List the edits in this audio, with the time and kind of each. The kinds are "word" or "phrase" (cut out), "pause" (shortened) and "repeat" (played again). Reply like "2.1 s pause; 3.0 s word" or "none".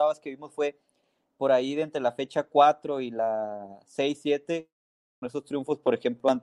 5.2 s word